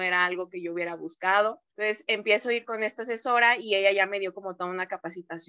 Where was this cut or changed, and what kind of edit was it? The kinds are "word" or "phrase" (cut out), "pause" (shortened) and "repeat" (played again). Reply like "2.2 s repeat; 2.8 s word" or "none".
1.7 s pause